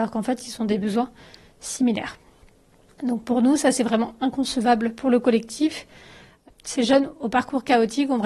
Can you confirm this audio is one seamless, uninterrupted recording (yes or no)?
yes